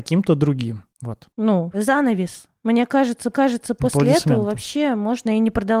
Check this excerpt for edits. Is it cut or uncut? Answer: cut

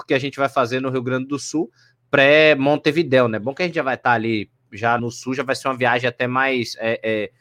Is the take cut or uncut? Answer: cut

